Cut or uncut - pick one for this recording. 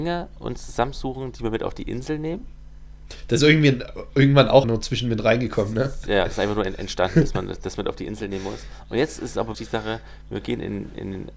cut